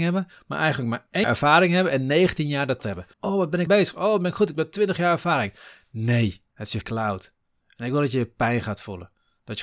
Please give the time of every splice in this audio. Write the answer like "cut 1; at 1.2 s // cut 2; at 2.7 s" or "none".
cut 1; at 1.2 s // cut 2; at 2.8 s // cut 3; at 3.1 s // cut 4; at 3.7 s // cut 5; at 6.5 s // cut 6; at 6.8 s